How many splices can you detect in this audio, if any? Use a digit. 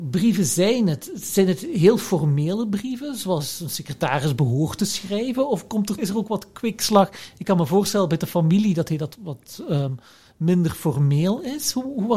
2